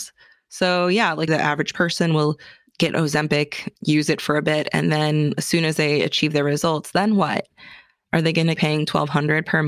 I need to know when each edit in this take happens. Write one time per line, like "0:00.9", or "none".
0:01.3
0:03.8
0:08.6